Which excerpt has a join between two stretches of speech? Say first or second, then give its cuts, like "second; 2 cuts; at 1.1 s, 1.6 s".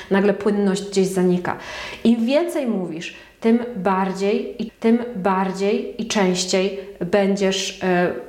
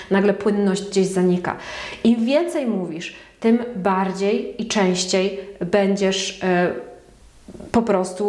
first; 1 cut; at 4.7 s